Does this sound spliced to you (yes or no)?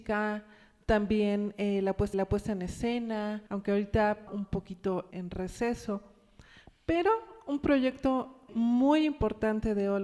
yes